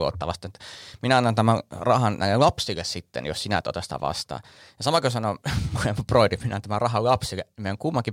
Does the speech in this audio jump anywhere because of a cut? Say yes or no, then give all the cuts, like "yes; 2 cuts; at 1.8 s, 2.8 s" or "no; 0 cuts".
no; 0 cuts